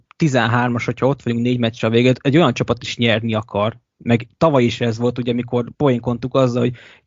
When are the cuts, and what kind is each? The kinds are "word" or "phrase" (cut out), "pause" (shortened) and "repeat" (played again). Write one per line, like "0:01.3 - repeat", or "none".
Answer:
0:05.7 - pause